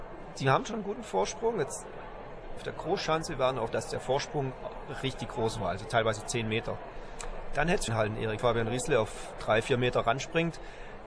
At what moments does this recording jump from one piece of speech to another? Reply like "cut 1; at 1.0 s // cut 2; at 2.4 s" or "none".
cut 1; at 2.6 s // cut 2; at 3.7 s // cut 3; at 7.9 s // cut 4; at 8.4 s

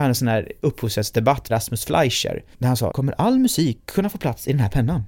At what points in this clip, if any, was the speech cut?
cut 1; at 1.5 s // cut 2; at 2.5 s // cut 3; at 2.9 s

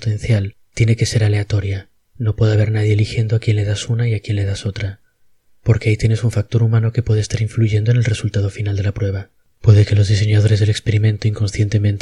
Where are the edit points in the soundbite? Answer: none

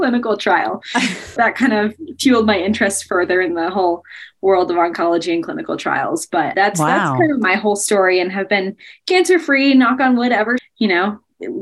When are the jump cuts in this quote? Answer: cut 1; at 1.4 s // cut 2; at 6.5 s // cut 3; at 10.6 s

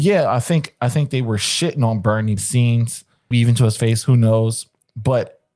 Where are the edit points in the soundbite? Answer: cut 1; at 2.4 s // cut 2; at 3.3 s

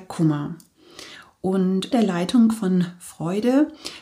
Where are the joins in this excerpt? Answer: cut 1; at 1.9 s

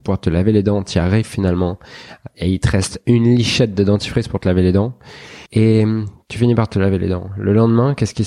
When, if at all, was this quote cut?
cut 1; at 5.5 s

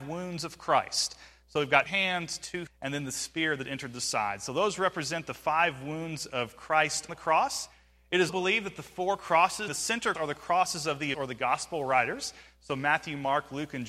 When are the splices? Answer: cut 1; at 1.9 s // cut 2; at 2.7 s // cut 3; at 7.1 s // cut 4; at 8.3 s // cut 5; at 9.7 s // cut 6; at 10.1 s // cut 7; at 11.1 s

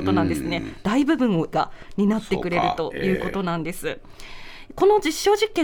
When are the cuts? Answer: cut 1; at 1.5 s

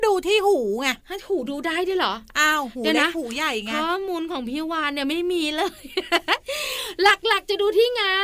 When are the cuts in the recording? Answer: cut 1; at 1.0 s

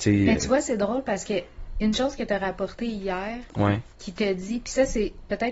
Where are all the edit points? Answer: cut 1; at 3.9 s

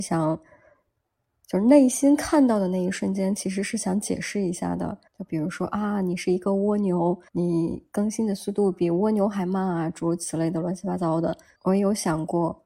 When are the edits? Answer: cut 1; at 5.1 s // cut 2; at 7.3 s // cut 3; at 11.5 s

